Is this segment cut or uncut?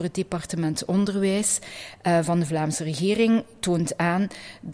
uncut